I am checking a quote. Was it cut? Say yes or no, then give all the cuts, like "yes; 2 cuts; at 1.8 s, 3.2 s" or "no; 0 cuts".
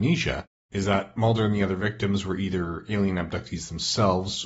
no; 0 cuts